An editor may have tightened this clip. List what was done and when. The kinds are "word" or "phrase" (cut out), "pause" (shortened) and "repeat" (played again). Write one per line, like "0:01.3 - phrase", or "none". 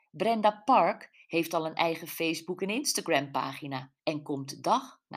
0:04.0 - pause